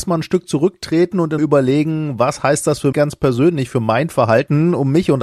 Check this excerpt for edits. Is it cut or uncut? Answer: cut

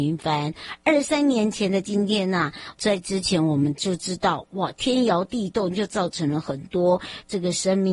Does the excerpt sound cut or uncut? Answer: cut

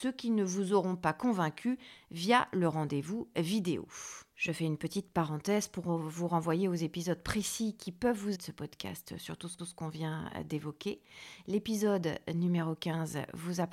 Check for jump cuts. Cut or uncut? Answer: cut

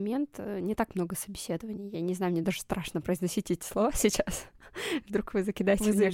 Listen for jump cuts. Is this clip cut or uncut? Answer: uncut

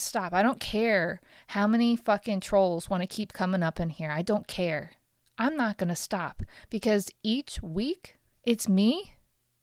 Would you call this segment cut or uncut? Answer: uncut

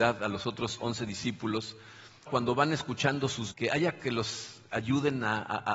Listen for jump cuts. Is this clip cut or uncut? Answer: cut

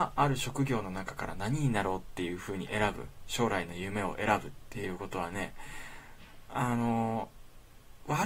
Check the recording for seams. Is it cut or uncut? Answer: uncut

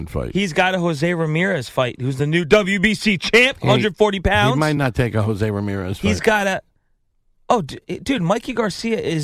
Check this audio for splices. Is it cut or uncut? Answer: uncut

